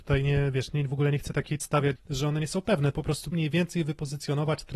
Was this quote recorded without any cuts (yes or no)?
no